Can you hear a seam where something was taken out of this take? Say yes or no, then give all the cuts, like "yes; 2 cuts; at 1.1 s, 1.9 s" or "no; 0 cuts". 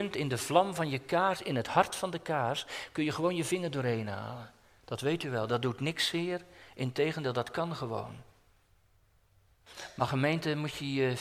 no; 0 cuts